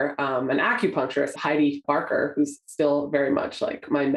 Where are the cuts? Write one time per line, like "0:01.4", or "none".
0:01.4
0:01.8

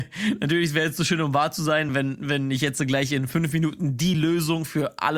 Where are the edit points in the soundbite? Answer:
none

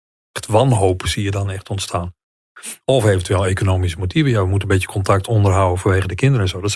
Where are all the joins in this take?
0:02.8

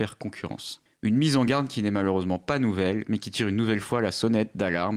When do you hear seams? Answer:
none

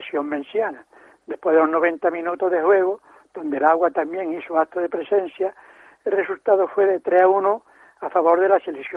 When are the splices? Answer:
none

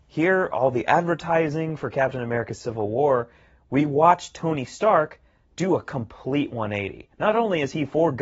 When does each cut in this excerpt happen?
0:07.1

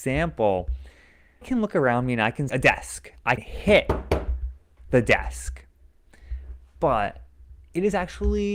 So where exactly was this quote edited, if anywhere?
0:01.4
0:02.5
0:03.4

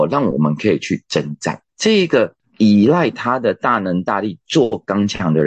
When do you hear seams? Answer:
0:01.7

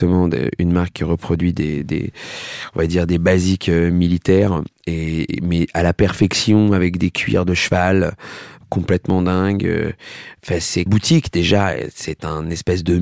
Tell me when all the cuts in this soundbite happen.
0:10.9

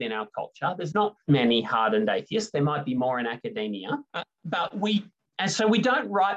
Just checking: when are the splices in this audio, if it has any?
0:01.2
0:04.1

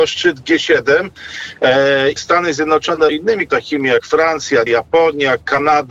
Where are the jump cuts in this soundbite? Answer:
0:02.2
0:03.1
0:03.5
0:04.7

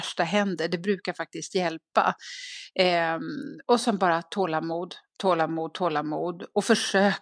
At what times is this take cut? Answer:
none

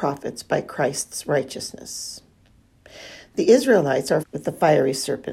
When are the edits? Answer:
0:04.2

